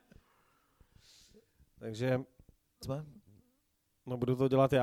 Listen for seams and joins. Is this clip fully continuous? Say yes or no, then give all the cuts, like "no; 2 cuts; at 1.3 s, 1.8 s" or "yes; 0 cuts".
no; 1 cut; at 2.8 s